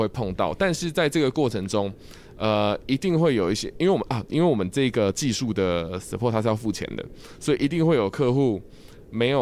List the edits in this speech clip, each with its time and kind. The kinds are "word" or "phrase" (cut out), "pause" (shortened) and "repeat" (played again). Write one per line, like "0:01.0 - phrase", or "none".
none